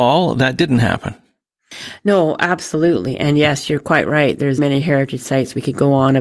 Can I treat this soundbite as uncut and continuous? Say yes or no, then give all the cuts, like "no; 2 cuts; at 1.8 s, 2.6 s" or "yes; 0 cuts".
no; 1 cut; at 4.6 s